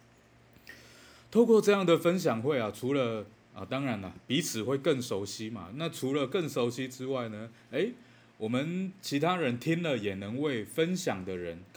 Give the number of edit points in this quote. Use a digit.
0